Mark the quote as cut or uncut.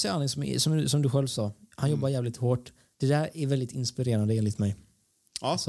cut